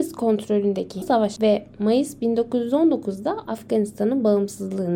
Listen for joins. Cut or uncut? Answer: cut